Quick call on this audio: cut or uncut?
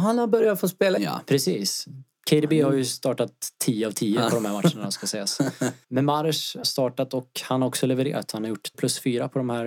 cut